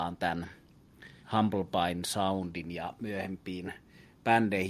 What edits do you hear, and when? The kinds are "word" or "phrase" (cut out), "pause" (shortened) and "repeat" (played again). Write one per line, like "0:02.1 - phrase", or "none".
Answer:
0:01.2 - pause